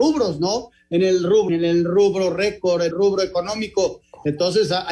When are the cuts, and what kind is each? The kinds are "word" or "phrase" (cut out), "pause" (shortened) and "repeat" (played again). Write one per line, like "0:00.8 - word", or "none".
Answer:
0:01.5 - word
0:02.9 - word